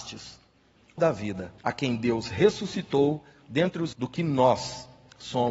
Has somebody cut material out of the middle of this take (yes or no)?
yes